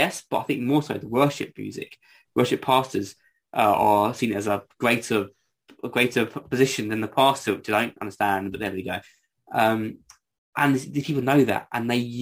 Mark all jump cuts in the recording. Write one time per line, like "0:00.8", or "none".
none